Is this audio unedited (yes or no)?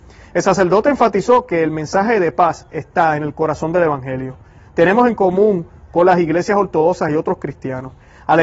yes